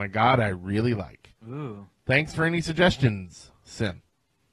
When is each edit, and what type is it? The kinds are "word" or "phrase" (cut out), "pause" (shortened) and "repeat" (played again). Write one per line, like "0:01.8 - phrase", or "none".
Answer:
0:01.4 - pause